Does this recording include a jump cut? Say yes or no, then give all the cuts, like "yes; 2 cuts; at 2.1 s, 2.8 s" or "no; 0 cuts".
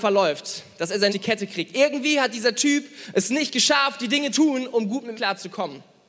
yes; 3 cuts; at 1.1 s, 4.3 s, 5.2 s